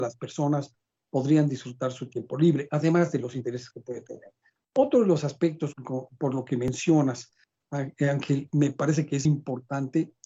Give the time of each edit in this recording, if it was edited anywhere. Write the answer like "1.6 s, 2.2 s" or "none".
5.7 s, 9.3 s